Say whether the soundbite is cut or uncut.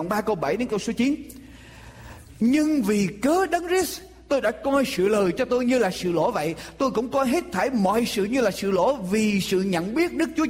uncut